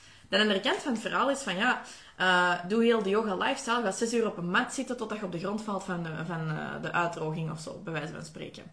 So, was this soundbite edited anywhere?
no; 0 cuts

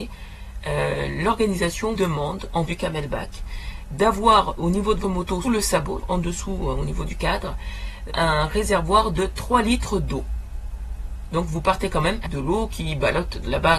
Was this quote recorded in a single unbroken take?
no; 8 cuts; at 1.9 s, 2.7 s, 4.6 s, 5.0 s, 5.4 s, 6.0 s, 8.1 s, 12.2 s

